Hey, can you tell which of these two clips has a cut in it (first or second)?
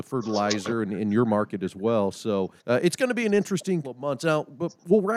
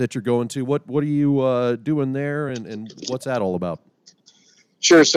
first